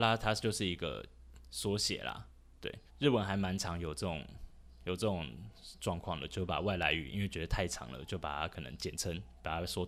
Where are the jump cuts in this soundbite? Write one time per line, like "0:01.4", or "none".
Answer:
0:02.9